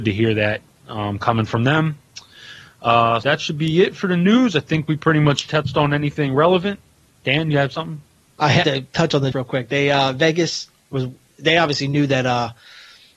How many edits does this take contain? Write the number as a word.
three